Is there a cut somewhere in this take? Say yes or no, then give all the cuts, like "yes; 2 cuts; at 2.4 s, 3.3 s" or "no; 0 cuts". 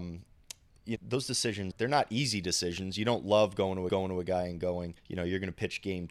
yes; 4 cuts; at 1.0 s, 1.7 s, 3.9 s, 5.0 s